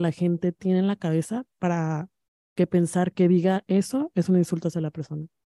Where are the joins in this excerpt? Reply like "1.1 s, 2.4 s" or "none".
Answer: none

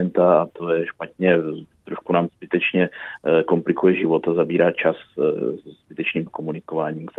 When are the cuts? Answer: 1.7 s, 2.3 s, 6.3 s

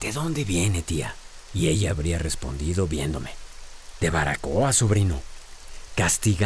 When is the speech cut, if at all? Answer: none

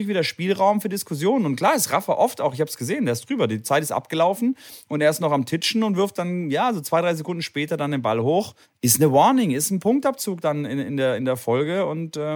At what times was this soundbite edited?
8.6 s

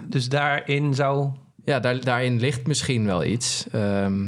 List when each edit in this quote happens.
1.5 s

